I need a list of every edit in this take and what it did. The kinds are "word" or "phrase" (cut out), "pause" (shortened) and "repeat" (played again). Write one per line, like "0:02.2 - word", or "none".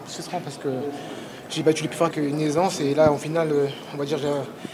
0:02.1 - phrase